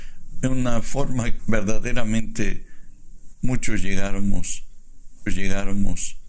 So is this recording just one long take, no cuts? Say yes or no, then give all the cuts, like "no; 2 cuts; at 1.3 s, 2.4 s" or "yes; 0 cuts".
no; 2 cuts; at 1.4 s, 5.3 s